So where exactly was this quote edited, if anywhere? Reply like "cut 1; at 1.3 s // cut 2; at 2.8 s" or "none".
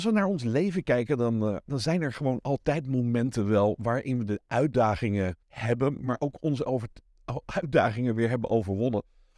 cut 1; at 5.4 s